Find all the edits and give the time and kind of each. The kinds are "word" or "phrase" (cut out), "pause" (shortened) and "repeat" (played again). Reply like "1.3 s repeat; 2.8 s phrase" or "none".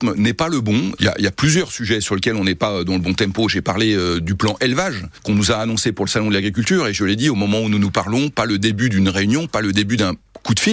none

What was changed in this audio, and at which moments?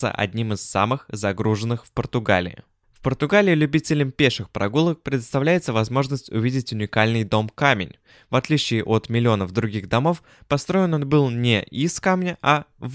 none

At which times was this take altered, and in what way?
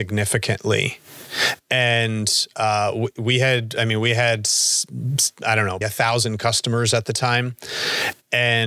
5.8 s word

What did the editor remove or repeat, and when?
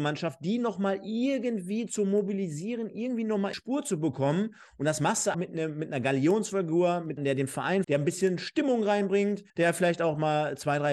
3.5 s word; 5.3 s word; 7.2 s word; 7.8 s word; 9.5 s pause

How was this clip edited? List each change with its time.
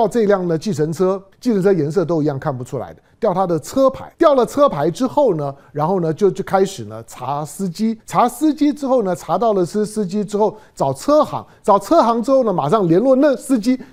1.3 s pause; 4.1 s pause; 8.0 s pause

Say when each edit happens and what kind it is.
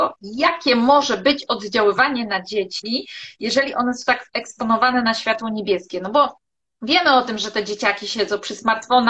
none

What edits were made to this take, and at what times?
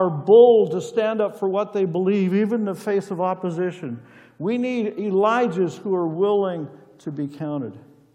none

